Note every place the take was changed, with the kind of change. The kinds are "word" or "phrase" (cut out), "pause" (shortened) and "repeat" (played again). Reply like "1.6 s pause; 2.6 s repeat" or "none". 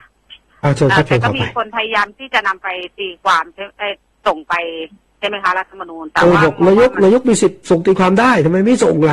none